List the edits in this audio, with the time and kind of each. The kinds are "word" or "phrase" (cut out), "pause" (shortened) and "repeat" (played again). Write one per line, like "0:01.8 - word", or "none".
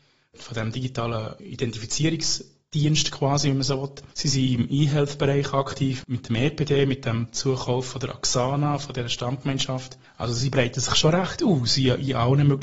0:04.1 - pause
0:10.0 - pause